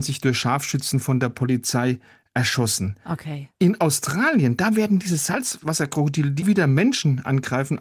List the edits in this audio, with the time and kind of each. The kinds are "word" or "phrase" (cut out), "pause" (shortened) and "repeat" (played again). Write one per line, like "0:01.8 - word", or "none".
0:06.4 - word